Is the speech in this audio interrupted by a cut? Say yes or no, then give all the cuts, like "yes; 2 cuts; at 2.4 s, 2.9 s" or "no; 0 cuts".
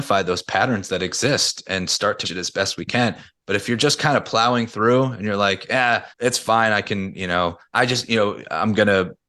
yes; 3 cuts; at 2.2 s, 6.1 s, 7.6 s